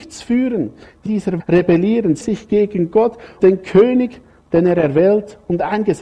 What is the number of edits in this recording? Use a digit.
4